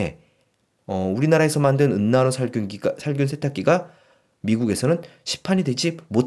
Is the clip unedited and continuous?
yes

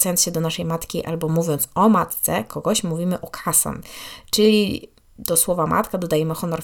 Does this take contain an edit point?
no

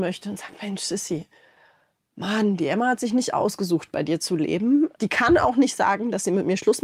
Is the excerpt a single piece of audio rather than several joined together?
yes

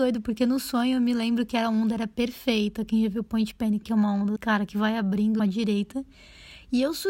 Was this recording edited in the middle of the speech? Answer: yes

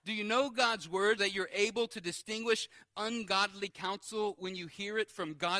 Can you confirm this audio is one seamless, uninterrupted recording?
no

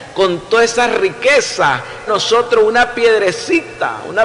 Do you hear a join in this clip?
yes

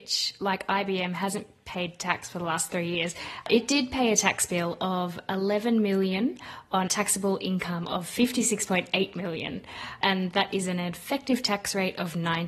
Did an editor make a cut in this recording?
yes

